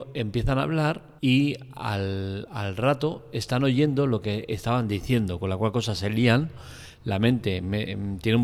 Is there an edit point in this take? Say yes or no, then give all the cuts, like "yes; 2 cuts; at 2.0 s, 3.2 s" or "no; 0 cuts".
yes; 1 cut; at 1.2 s